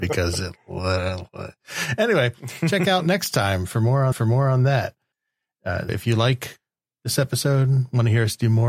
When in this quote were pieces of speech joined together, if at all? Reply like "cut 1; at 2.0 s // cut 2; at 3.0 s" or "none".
cut 1; at 4.1 s // cut 2; at 5.9 s